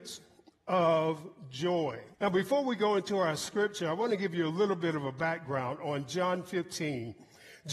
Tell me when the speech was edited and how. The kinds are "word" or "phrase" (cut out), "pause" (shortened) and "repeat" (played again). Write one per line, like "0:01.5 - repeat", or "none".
0:02.1 - pause